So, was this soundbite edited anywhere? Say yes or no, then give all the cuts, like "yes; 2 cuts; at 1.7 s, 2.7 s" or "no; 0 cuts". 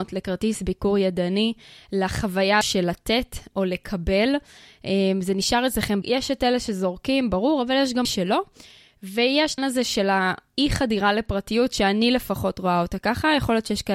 yes; 4 cuts; at 2.6 s, 6.0 s, 8.0 s, 9.6 s